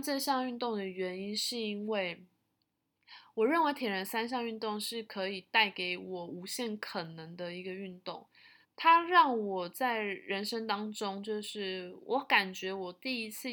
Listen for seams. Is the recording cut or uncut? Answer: cut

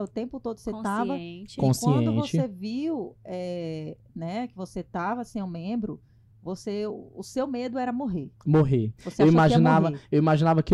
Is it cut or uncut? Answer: uncut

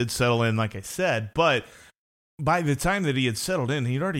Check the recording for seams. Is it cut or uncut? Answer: uncut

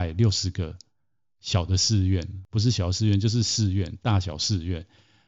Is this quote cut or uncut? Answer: uncut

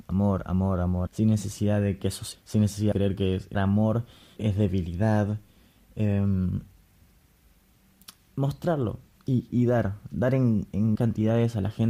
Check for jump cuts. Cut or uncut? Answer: cut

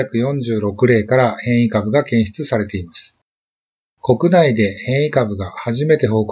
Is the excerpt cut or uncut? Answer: uncut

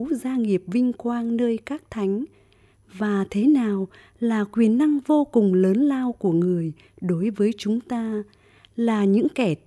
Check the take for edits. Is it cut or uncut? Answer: uncut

